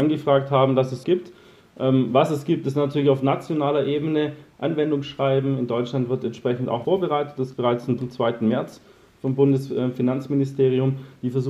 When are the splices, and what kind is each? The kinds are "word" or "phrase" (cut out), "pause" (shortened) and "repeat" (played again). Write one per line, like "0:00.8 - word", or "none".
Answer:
0:01.0 - word
0:06.8 - word
0:07.5 - word
0:08.0 - word